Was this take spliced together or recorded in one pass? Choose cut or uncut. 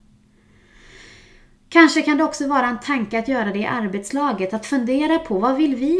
uncut